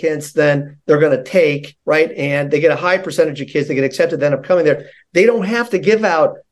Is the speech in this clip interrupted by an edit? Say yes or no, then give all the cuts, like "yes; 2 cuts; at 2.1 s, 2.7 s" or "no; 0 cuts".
yes; 1 cut; at 1.8 s